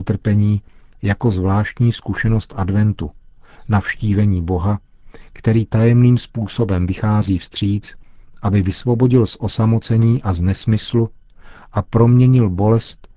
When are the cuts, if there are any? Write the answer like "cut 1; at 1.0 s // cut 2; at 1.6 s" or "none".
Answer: none

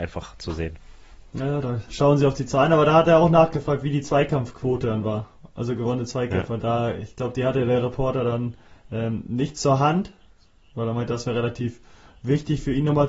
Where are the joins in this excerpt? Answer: none

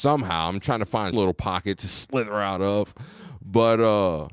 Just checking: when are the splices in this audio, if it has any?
cut 1; at 1.1 s

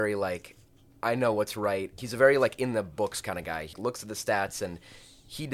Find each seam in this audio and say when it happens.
cut 1; at 2.0 s // cut 2; at 3.7 s

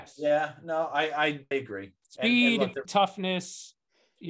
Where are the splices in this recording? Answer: cut 1; at 1.5 s // cut 2; at 2.9 s

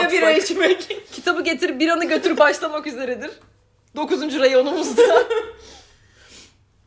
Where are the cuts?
cut 1; at 2.4 s

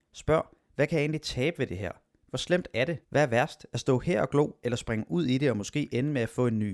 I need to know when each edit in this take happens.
cut 1; at 3.0 s

